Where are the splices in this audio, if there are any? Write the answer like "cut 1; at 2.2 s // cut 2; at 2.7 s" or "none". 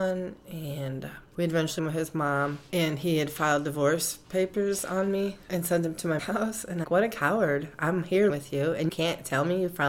cut 1; at 1.8 s // cut 2; at 6.2 s // cut 3; at 6.8 s // cut 4; at 8.3 s // cut 5; at 8.9 s